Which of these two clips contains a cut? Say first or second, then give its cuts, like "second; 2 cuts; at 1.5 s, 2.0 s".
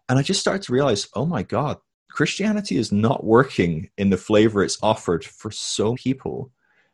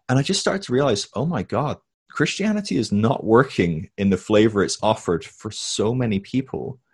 first; 1 cut; at 5.9 s